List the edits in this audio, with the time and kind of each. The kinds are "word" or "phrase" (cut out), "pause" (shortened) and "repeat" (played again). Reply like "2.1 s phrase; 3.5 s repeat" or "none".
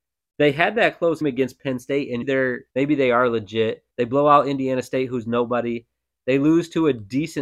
1.2 s word; 2.2 s phrase; 2.7 s pause; 3.9 s pause